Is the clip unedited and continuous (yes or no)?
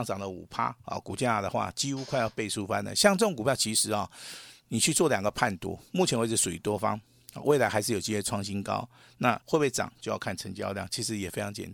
no